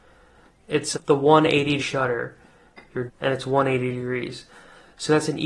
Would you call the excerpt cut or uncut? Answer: cut